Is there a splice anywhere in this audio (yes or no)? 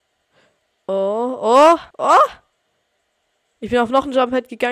yes